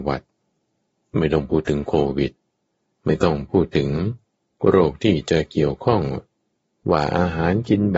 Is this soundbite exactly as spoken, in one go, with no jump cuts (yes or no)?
yes